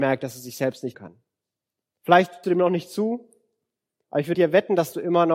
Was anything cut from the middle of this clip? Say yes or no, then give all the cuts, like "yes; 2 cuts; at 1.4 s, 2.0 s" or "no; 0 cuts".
yes; 3 cuts; at 0.9 s, 2.4 s, 4.3 s